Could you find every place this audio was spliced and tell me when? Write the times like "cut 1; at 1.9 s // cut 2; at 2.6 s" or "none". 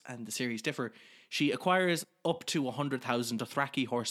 none